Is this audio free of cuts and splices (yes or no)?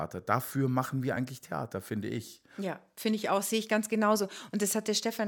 yes